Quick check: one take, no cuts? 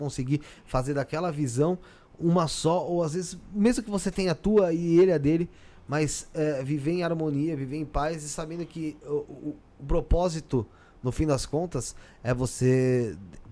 yes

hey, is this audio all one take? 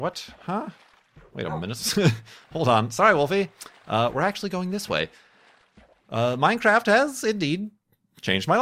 yes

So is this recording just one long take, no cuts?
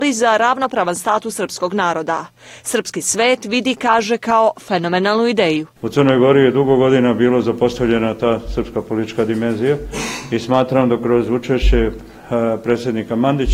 yes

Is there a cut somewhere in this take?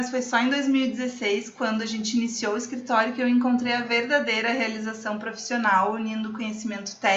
no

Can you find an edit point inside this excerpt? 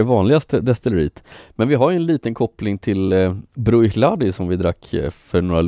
no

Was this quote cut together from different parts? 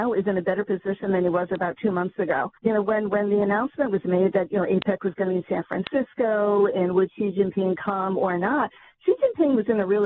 yes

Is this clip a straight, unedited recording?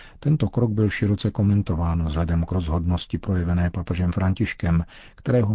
yes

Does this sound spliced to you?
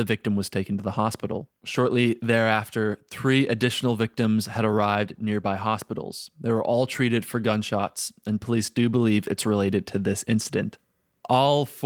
yes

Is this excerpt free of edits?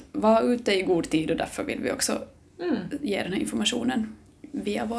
yes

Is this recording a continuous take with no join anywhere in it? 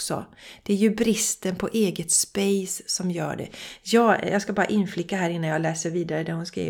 yes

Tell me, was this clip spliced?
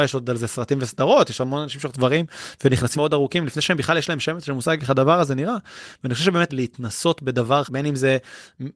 yes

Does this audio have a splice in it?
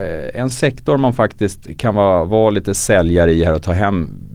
no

